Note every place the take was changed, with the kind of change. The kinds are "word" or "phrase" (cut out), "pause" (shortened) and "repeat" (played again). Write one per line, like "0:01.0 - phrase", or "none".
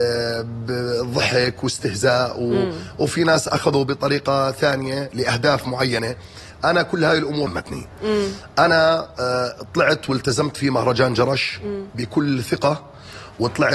0:07.5 - word

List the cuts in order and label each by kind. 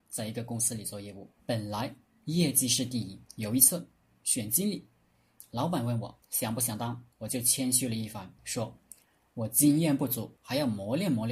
0:01.4 - pause
0:03.3 - pause
0:06.2 - pause
0:07.1 - pause
0:08.4 - pause
0:10.4 - pause

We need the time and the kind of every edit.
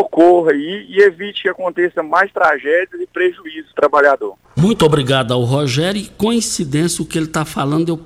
0:03.7 - phrase
0:04.4 - pause

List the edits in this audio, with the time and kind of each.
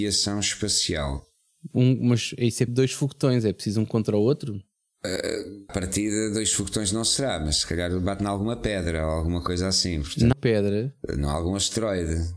0:02.7 - word
0:05.7 - word
0:10.3 - word

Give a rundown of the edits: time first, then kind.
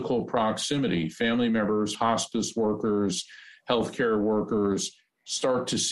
0:01.9 - word

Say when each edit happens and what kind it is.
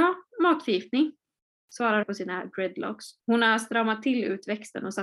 0:02.0 - phrase
0:03.2 - pause

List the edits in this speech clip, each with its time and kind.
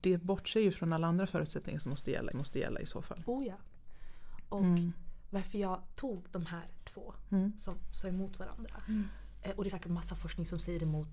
0:02.3 - repeat
0:09.7 - word

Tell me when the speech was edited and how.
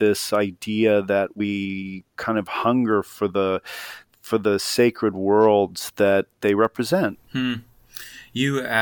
none

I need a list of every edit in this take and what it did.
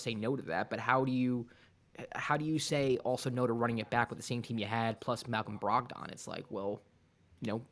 none

